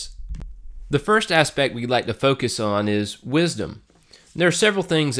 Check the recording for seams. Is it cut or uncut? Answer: uncut